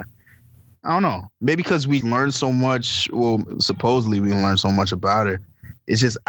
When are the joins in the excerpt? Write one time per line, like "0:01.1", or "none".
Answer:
0:02.0